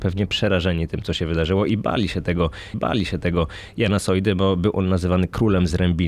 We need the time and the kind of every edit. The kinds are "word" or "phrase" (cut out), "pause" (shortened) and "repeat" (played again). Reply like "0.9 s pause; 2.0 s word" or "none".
2.7 s repeat